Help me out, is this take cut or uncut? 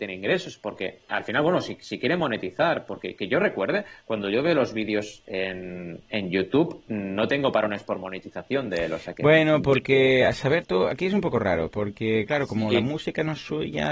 uncut